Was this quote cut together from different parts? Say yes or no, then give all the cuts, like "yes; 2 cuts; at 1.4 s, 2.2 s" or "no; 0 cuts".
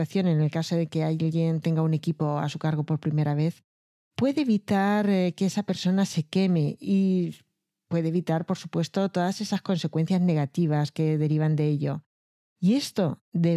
yes; 1 cut; at 1.6 s